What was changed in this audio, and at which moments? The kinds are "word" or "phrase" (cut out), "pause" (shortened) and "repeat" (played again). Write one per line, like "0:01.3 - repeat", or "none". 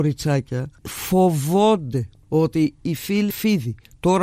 0:03.3 - word